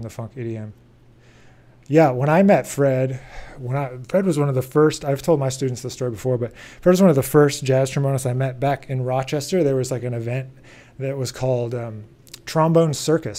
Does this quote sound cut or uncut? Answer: uncut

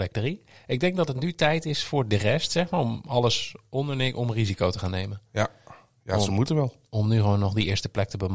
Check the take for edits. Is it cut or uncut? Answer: uncut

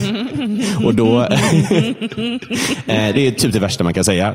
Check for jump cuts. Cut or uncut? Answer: uncut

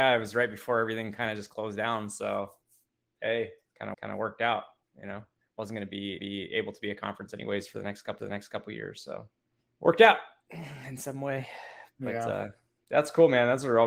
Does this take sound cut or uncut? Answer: cut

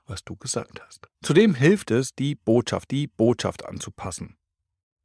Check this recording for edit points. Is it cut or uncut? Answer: cut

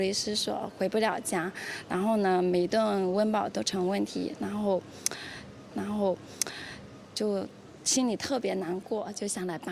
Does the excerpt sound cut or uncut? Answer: cut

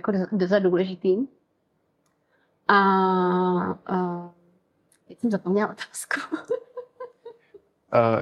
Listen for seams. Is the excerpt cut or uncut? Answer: uncut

